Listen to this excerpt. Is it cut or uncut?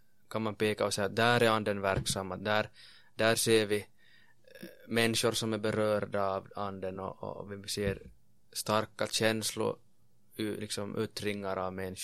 uncut